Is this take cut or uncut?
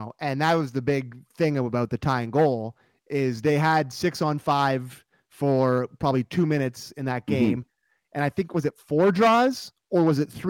uncut